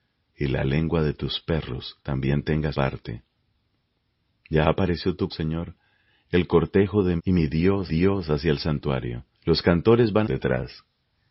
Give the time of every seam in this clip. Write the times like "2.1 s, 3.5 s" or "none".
2.0 s, 2.7 s, 5.3 s, 7.2 s, 7.9 s, 9.3 s, 10.2 s